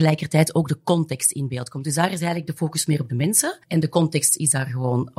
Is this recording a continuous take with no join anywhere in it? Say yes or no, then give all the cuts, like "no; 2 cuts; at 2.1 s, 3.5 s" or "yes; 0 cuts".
no; 1 cut; at 3.6 s